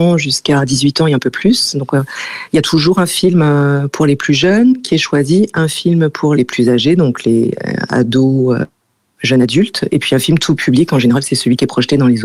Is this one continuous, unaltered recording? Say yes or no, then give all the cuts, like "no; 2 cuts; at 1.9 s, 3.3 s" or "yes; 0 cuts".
yes; 0 cuts